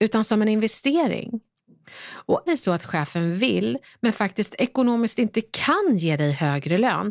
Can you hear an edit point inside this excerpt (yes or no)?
yes